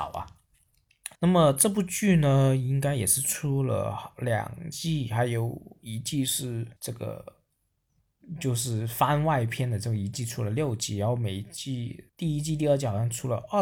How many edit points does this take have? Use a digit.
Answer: 3